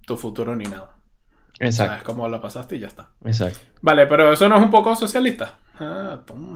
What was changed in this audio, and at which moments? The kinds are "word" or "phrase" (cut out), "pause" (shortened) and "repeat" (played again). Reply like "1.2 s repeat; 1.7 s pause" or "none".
3.2 s pause